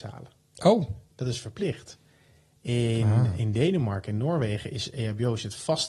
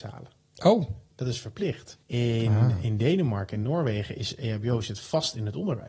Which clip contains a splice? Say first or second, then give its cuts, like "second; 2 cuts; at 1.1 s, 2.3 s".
second; 1 cut; at 2.0 s